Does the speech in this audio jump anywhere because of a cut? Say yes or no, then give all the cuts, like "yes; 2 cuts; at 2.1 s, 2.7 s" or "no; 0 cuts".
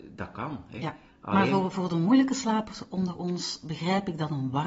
no; 0 cuts